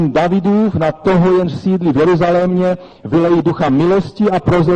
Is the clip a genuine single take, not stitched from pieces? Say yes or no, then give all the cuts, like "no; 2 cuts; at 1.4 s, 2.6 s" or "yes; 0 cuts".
yes; 0 cuts